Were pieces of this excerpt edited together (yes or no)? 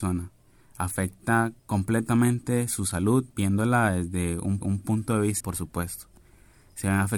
yes